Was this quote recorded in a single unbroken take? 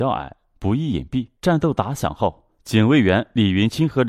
no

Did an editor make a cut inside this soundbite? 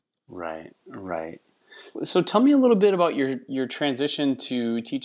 yes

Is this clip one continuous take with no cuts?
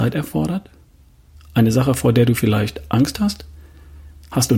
yes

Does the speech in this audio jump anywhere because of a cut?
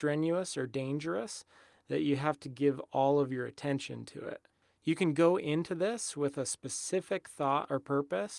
no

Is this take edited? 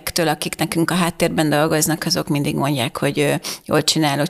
no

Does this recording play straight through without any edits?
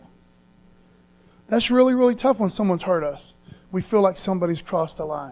yes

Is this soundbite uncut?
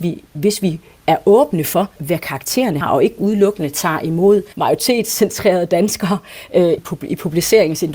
no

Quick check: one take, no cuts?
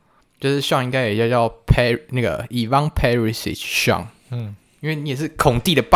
yes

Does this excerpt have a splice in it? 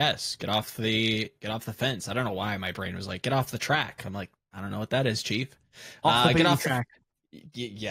no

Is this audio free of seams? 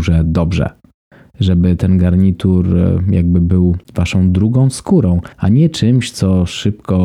no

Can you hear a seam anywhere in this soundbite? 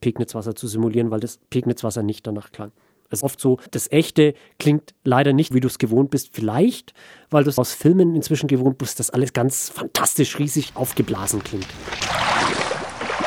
yes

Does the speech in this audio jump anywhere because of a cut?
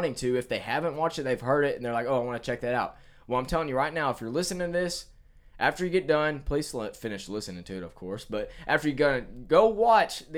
no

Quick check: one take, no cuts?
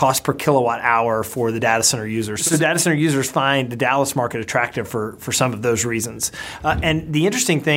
yes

